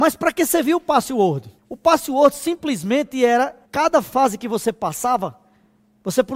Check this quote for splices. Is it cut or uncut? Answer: cut